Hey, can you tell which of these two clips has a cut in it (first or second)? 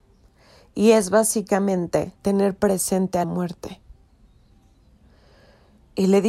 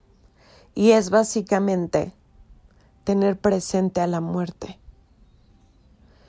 first